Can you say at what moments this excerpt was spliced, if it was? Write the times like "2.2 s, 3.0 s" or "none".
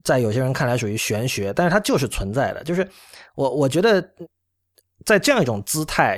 none

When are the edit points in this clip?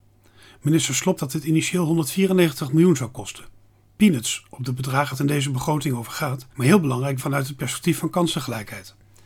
1.2 s, 5.1 s, 6.5 s, 7.2 s

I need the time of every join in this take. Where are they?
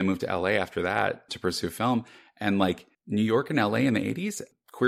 2.9 s

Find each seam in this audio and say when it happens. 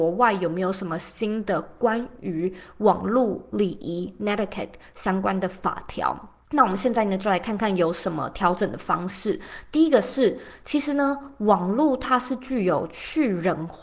6.4 s

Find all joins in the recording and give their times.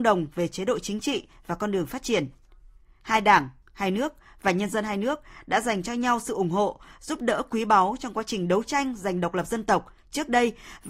none

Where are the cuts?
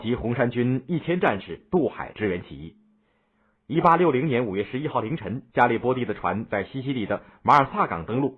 5.5 s

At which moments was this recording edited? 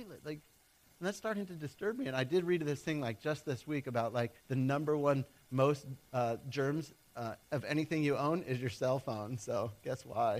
4.4 s, 7.4 s

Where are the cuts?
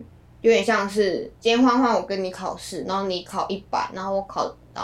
1.4 s

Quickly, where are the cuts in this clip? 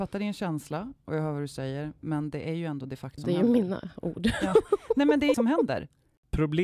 3.2 s, 5.3 s

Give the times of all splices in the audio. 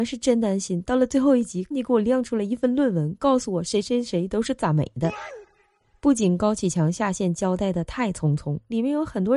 1.7 s

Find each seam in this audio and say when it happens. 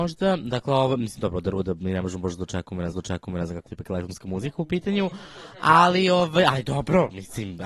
2.9 s, 3.7 s

